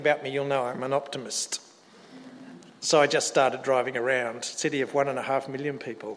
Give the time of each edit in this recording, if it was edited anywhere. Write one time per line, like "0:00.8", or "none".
none